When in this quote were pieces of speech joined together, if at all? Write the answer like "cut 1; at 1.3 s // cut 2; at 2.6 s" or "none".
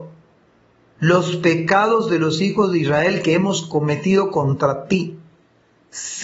none